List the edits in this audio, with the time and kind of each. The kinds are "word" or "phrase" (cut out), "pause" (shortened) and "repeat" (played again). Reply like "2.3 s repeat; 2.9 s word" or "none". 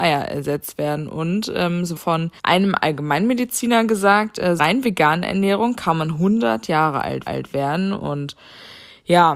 2.0 s phrase; 2.4 s pause; 4.6 s phrase; 7.3 s repeat